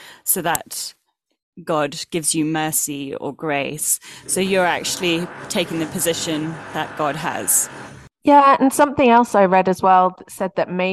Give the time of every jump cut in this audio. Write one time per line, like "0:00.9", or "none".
none